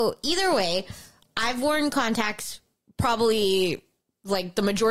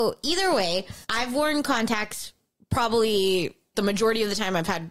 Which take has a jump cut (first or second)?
second